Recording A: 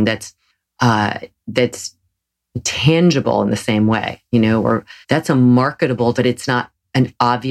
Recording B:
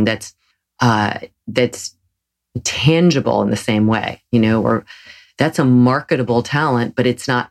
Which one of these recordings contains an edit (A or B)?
A